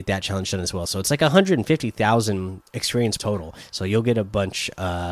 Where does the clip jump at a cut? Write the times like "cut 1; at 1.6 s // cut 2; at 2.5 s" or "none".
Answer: cut 1; at 3.2 s